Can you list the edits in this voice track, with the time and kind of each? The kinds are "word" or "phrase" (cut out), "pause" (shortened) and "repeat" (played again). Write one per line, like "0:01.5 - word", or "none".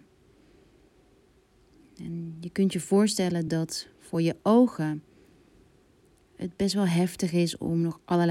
none